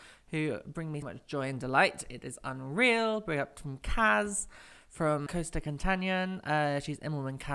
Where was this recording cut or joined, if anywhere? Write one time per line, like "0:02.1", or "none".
0:01.0
0:05.3